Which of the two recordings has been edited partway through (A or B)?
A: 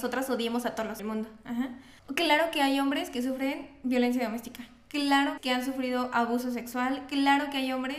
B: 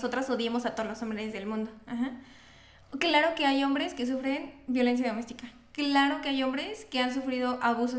A